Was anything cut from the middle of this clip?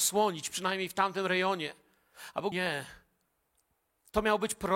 yes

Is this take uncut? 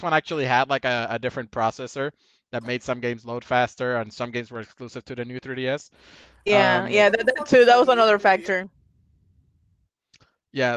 yes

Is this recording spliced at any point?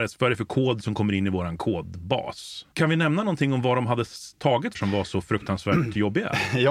yes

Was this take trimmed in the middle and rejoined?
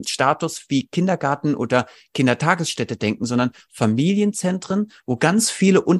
no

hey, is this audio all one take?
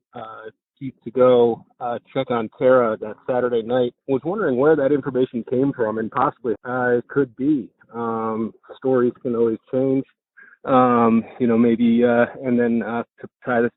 no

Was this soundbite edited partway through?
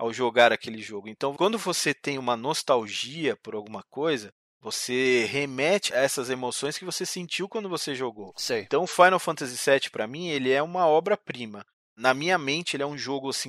no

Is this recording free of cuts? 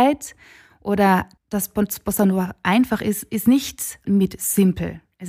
no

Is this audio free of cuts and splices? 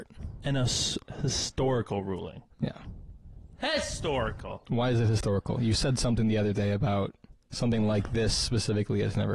yes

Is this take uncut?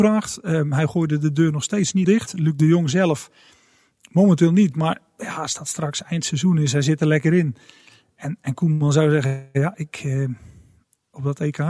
no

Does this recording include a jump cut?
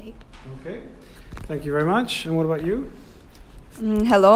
no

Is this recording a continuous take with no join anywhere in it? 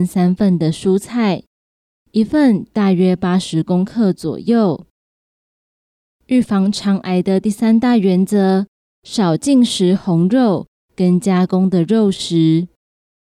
yes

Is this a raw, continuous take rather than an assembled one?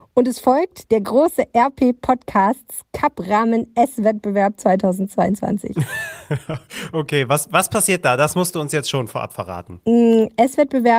yes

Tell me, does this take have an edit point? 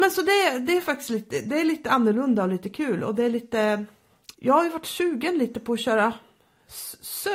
yes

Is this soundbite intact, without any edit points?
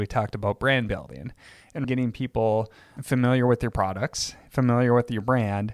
no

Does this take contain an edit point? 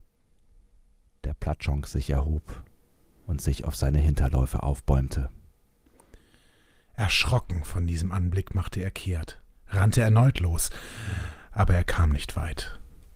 no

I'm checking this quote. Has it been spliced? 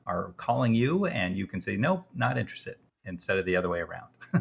no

